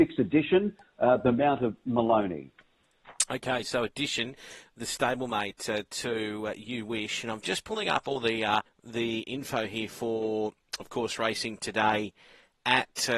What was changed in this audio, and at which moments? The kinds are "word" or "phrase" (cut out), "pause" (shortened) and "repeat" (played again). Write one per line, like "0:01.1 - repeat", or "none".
0:08.7 - pause